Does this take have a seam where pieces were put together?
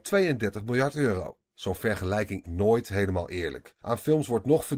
yes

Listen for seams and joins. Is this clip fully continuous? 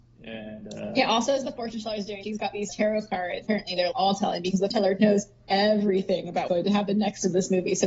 no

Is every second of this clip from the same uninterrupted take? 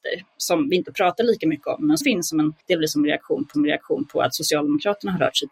no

